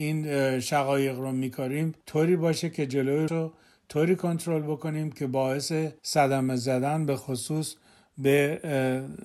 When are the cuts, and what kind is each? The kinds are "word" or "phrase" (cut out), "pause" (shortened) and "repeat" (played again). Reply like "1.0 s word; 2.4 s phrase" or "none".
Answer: 2.0 s pause; 3.3 s word; 6.0 s pause